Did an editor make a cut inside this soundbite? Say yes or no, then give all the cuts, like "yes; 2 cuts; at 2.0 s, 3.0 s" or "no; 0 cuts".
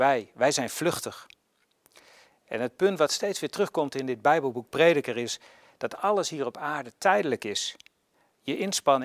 no; 0 cuts